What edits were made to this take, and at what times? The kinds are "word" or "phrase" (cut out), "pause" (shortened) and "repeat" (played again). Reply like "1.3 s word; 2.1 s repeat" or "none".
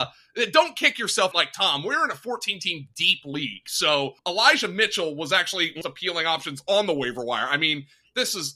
1.3 s phrase; 4.2 s pause; 5.8 s phrase